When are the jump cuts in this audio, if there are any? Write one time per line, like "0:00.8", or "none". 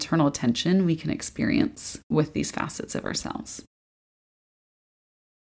none